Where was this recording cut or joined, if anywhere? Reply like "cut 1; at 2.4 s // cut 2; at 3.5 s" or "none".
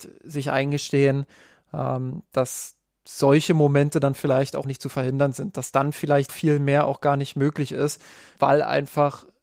cut 1; at 4.6 s // cut 2; at 6.3 s // cut 3; at 8.4 s